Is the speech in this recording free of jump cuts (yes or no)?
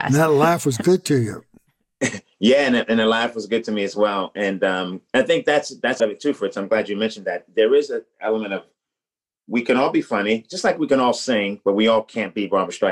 no